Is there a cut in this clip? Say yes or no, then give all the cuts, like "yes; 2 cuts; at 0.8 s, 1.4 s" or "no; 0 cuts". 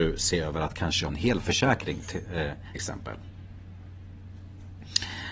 yes; 2 cuts; at 1.1 s, 2.8 s